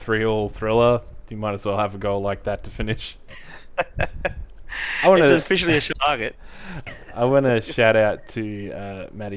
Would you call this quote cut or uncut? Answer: cut